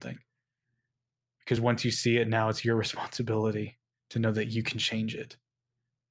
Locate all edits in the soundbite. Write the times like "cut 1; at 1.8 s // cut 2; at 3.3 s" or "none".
none